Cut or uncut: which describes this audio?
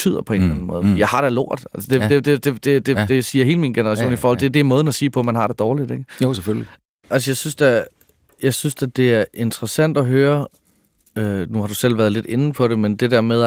uncut